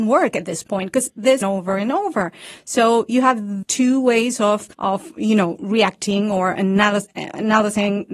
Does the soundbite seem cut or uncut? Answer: cut